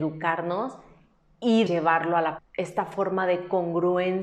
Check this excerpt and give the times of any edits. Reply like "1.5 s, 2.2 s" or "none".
1.7 s, 2.4 s